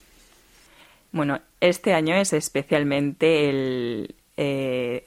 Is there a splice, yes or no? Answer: no